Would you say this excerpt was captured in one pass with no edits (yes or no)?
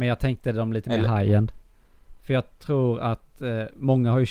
yes